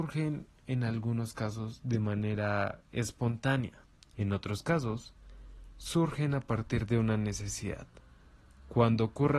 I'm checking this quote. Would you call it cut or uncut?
cut